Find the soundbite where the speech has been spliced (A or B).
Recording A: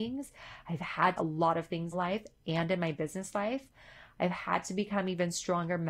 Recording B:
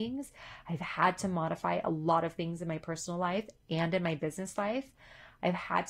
A